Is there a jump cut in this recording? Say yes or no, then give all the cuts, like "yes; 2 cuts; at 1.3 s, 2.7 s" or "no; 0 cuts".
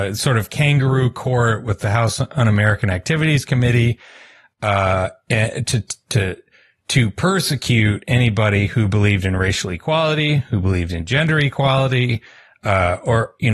no; 0 cuts